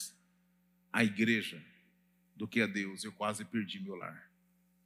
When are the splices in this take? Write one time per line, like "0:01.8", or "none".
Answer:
none